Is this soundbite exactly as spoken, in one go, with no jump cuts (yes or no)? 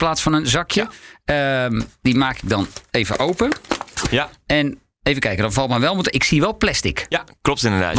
yes